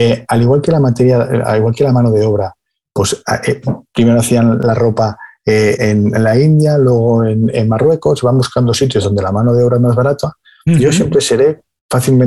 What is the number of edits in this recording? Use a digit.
1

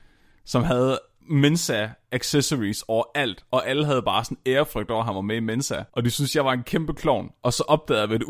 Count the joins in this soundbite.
1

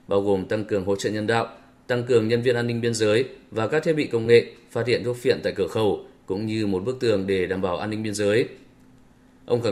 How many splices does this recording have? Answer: 0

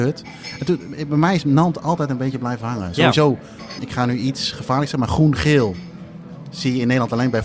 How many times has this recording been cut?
1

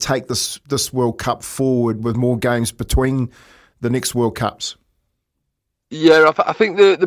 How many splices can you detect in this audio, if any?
0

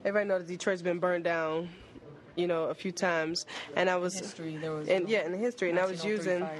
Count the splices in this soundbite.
0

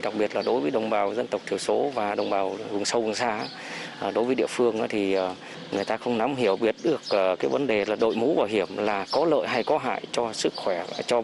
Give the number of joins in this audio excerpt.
0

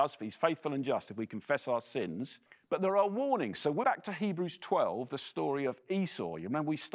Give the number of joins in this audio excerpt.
2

